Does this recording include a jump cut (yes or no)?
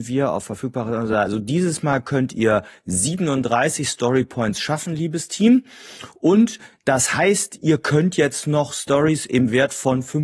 no